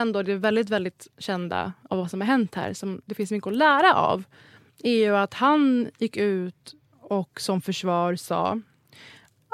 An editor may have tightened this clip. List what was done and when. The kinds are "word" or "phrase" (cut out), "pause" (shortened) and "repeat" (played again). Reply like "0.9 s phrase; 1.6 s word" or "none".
none